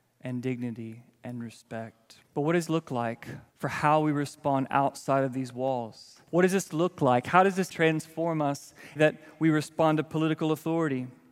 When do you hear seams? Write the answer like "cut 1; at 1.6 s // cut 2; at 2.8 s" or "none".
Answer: cut 1; at 2.2 s // cut 2; at 2.7 s // cut 3; at 3.5 s // cut 4; at 6.3 s // cut 5; at 7.7 s // cut 6; at 9.0 s